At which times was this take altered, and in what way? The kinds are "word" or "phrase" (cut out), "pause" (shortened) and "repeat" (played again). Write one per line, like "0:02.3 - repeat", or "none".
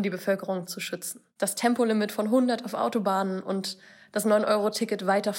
none